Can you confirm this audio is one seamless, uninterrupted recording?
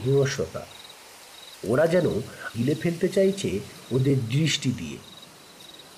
no; 1 cut; at 2.5 s

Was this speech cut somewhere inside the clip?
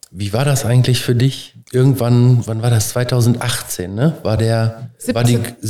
no; 0 cuts

